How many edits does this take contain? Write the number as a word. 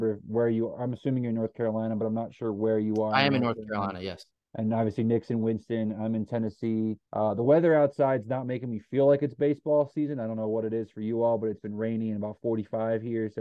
two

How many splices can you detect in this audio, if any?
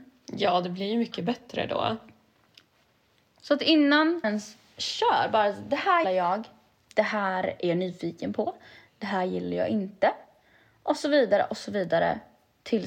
two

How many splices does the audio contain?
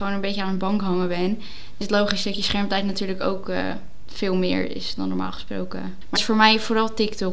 two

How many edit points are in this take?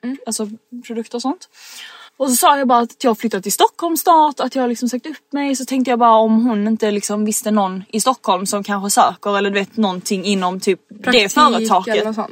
one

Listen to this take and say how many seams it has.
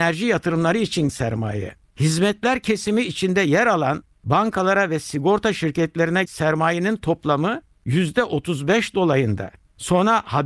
two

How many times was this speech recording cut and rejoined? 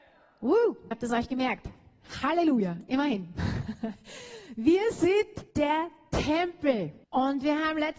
three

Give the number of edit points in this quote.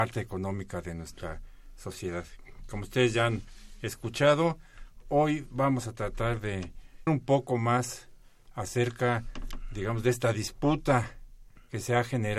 one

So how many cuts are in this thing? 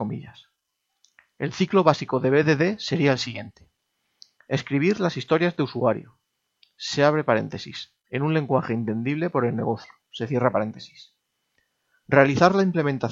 zero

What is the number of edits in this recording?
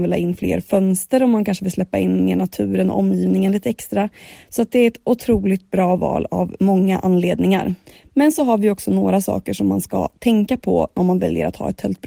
zero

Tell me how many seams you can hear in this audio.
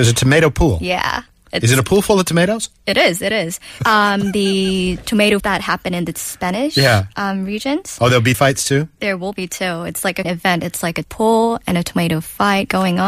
five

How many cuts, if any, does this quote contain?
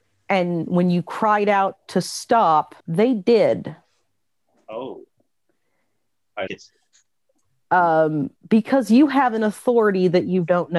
four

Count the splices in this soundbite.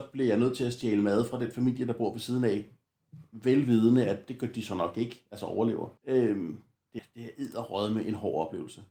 two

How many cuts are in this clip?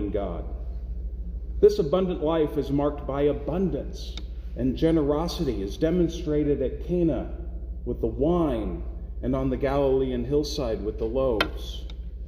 zero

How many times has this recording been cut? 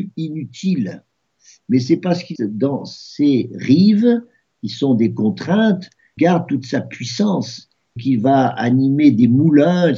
three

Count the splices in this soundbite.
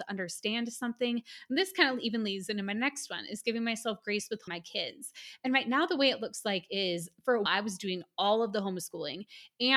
two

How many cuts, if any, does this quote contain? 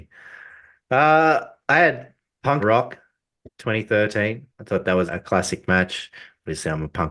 three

